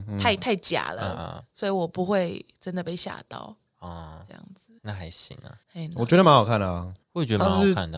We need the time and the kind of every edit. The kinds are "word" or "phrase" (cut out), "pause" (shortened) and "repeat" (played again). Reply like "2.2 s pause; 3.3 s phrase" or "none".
4.8 s pause; 5.6 s pause; 7.0 s pause